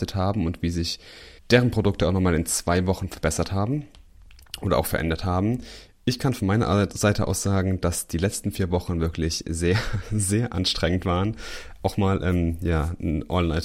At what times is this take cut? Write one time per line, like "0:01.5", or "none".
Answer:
0:01.4

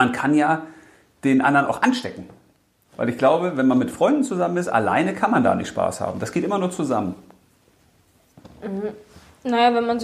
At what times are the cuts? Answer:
none

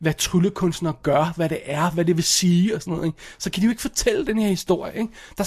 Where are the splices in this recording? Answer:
none

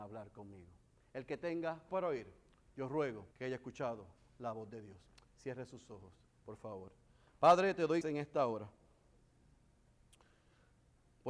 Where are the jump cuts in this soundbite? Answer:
0:01.9
0:03.3
0:08.0

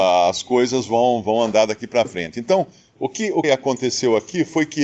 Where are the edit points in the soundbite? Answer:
0:03.4

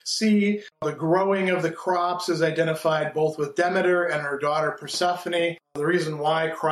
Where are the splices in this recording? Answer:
none

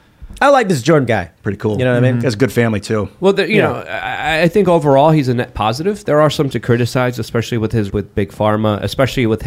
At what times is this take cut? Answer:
0:01.1
0:06.5
0:07.9

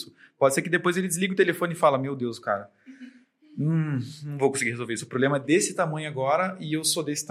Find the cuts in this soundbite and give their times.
none

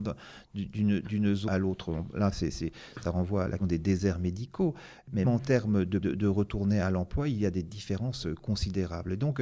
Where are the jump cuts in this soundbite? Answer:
0:01.5
0:03.6
0:05.2
0:06.0

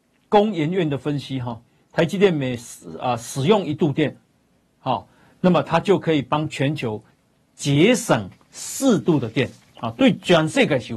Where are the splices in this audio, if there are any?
none

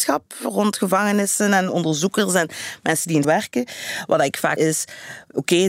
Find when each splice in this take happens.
0:03.2
0:04.6

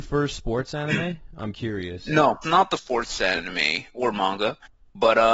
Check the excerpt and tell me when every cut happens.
0:02.4
0:02.8

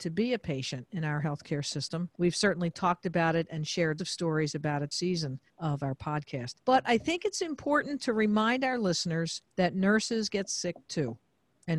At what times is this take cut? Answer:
0:02.1
0:04.0
0:04.9
0:05.5
0:06.6
0:09.5

